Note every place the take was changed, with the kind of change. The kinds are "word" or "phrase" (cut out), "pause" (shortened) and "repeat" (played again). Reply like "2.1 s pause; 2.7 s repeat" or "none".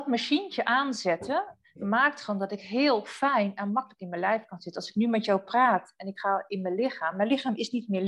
none